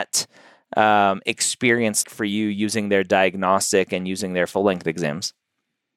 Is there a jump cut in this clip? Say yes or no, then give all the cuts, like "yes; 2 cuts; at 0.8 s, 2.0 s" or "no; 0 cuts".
yes; 1 cut; at 2.0 s